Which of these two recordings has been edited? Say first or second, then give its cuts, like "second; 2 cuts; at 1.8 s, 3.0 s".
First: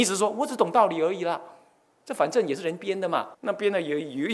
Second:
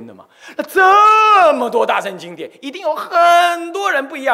first; 1 cut; at 3.3 s